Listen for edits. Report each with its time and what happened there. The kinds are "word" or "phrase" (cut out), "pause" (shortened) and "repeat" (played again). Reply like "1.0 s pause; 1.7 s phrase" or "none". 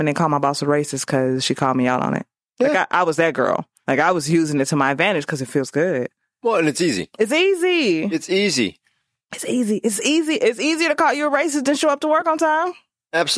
none